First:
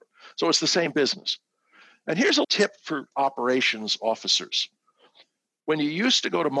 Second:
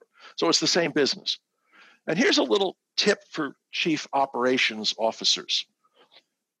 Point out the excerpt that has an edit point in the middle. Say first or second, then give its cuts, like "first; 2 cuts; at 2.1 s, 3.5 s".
first; 2 cuts; at 2.4 s, 3.1 s